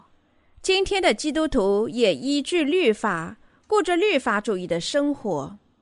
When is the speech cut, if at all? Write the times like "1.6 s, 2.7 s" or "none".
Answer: none